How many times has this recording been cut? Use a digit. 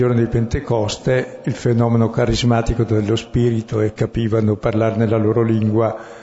1